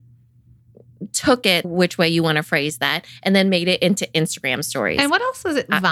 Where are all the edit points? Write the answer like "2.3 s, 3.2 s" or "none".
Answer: 1.6 s